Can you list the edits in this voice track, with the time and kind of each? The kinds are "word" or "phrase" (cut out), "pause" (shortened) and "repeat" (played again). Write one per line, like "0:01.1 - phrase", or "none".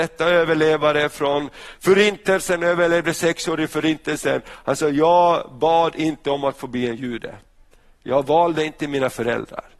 none